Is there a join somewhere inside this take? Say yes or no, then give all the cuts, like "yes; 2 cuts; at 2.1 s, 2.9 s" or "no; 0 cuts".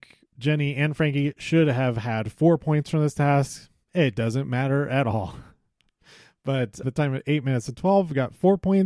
yes; 1 cut; at 6.8 s